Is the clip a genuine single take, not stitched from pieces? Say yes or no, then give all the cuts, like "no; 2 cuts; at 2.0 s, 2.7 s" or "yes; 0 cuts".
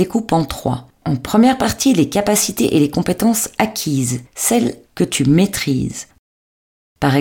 no; 1 cut; at 4.8 s